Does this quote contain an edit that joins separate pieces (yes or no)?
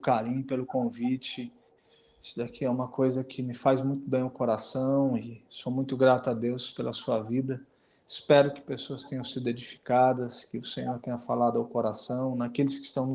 no